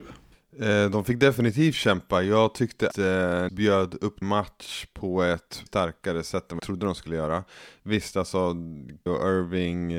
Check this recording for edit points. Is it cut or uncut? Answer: cut